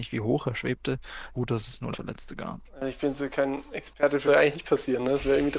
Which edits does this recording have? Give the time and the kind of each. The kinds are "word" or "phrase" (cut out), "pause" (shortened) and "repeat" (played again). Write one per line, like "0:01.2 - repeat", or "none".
0:01.3 - phrase
0:01.9 - word
0:04.3 - phrase